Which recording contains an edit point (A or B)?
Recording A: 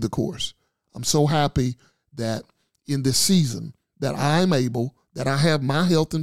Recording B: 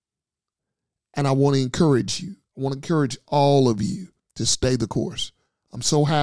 B